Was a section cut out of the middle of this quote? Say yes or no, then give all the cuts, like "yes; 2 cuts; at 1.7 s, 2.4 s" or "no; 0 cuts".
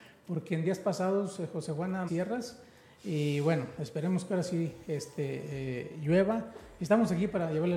yes; 1 cut; at 2.1 s